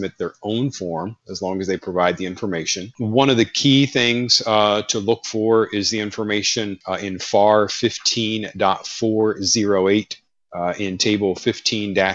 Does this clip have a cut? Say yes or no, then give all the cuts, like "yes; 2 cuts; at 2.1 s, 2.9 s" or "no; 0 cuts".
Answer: no; 0 cuts